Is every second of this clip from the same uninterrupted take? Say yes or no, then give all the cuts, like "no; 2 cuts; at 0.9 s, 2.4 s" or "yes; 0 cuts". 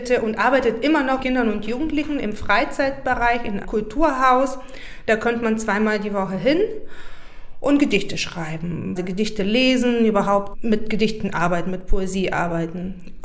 no; 3 cuts; at 1.2 s, 3.6 s, 9.0 s